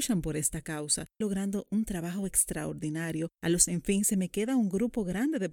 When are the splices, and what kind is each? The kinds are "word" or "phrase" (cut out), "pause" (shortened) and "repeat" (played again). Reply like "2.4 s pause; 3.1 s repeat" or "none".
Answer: 1.2 s phrase; 3.3 s pause; 3.7 s word